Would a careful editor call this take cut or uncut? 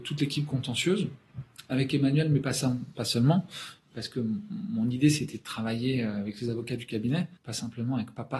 cut